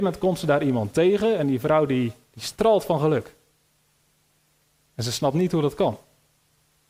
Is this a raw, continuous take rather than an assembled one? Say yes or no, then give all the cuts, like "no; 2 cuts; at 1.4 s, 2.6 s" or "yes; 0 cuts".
yes; 0 cuts